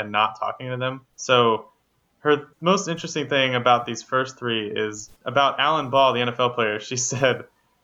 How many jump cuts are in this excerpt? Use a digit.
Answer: 2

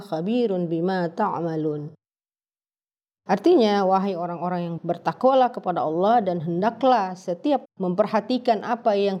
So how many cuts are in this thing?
2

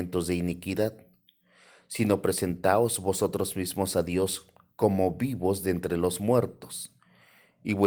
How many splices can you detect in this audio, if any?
0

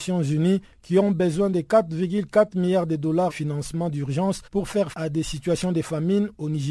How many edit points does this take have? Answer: 3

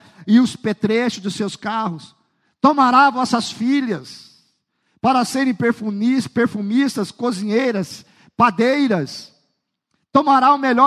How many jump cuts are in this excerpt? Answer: 0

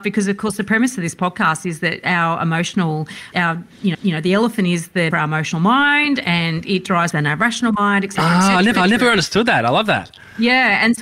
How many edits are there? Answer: 5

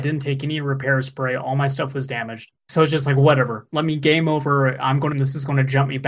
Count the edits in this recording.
2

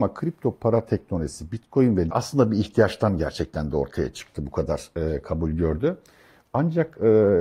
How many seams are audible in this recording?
1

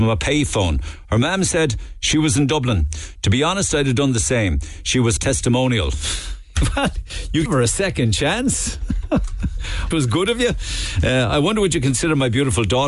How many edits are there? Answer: 3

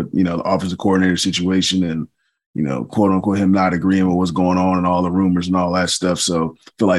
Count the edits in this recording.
0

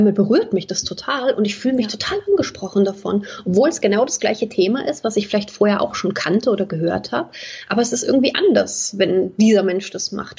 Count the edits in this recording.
0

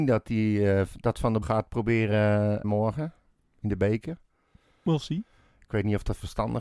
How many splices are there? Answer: 2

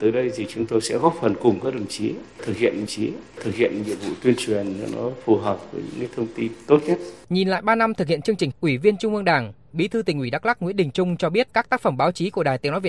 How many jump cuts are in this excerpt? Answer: 4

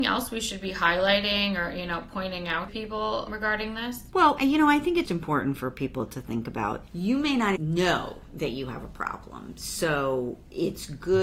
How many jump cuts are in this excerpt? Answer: 4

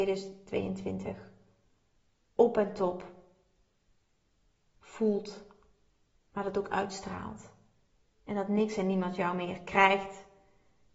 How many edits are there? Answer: 1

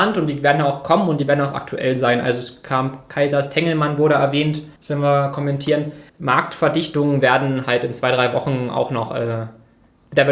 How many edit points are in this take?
2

